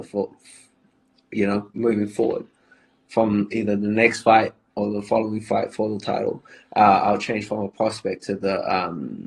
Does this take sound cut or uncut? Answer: uncut